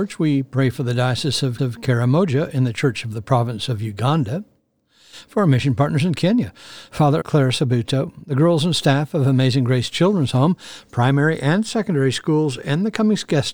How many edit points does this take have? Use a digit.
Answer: 2